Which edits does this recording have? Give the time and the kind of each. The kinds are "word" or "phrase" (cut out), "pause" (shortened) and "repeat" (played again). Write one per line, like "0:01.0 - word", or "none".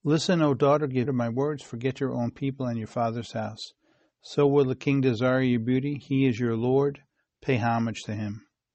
0:01.1 - word